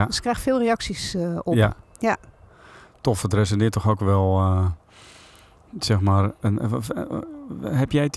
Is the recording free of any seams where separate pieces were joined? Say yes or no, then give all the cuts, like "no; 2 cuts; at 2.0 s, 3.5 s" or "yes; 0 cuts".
yes; 0 cuts